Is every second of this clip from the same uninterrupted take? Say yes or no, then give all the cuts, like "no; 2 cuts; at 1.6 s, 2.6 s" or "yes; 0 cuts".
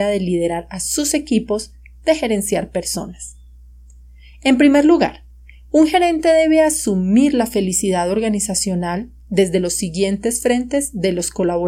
yes; 0 cuts